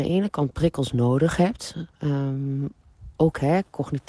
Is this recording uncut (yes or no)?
no